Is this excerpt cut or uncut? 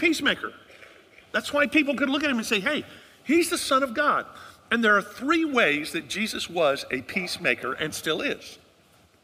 uncut